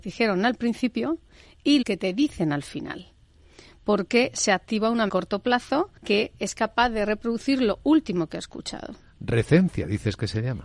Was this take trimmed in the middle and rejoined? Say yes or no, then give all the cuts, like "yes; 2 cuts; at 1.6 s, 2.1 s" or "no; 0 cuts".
yes; 3 cuts; at 1.8 s, 5.1 s, 6.0 s